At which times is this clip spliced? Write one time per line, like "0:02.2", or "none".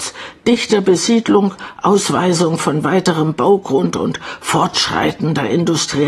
none

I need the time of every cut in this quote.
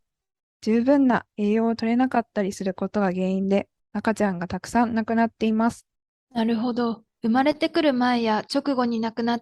0:03.8
0:06.0
0:07.1

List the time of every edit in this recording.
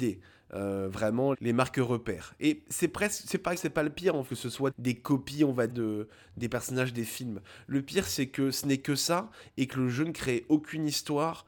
0:01.3
0:03.6
0:04.3
0:04.7
0:05.7

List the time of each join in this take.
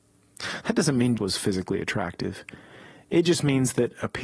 0:01.2

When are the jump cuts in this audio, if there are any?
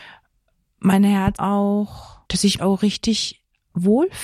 0:01.4
0:02.3
0:02.6

